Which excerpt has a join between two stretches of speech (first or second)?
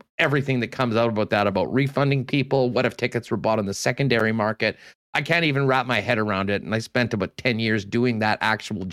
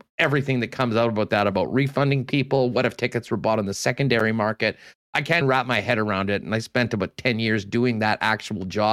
second